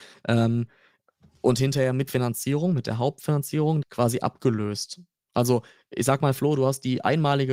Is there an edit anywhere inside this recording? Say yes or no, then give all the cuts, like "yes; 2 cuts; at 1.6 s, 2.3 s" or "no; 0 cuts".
yes; 2 cuts; at 2.1 s, 3.8 s